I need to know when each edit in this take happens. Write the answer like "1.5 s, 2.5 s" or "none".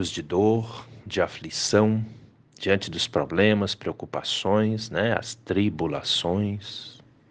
2.4 s